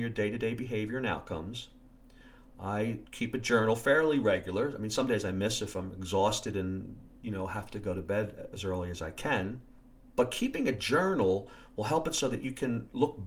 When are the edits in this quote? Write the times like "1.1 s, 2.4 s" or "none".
3.1 s, 7.2 s, 9.8 s